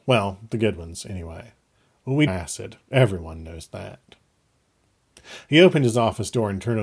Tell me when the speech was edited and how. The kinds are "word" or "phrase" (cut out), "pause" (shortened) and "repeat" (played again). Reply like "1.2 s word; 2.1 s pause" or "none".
2.3 s word